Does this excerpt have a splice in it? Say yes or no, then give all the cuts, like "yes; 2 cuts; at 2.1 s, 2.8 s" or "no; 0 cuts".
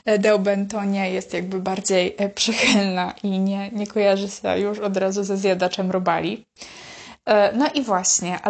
no; 0 cuts